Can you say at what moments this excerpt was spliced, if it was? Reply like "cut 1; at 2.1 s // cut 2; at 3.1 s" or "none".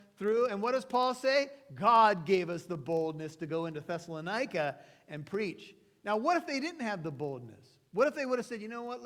none